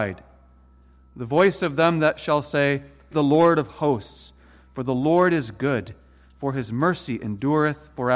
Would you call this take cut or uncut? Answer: cut